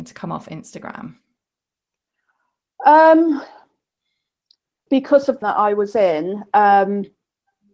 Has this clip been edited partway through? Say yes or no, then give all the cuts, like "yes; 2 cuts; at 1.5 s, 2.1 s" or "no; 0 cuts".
yes; 2 cuts; at 4.9 s, 5.4 s